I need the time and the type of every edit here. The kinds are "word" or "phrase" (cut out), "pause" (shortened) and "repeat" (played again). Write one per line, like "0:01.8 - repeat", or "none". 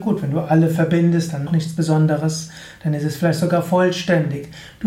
0:01.5 - phrase